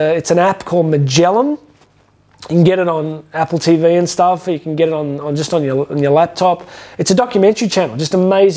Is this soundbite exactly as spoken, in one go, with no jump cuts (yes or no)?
yes